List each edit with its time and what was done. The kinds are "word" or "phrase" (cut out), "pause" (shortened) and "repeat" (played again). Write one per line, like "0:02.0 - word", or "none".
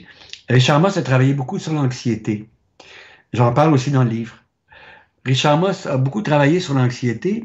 none